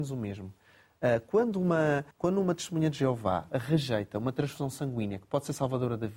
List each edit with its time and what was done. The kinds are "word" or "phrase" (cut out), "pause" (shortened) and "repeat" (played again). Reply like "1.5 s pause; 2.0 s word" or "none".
2.1 s pause